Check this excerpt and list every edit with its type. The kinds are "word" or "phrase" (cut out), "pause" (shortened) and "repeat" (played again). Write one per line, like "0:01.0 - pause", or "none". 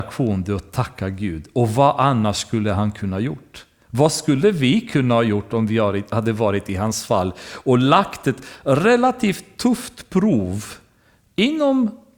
none